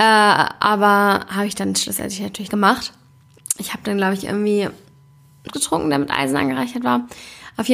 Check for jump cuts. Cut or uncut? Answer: cut